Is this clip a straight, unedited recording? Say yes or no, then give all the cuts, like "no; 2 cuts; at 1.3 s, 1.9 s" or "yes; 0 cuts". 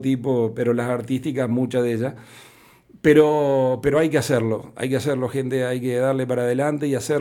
yes; 0 cuts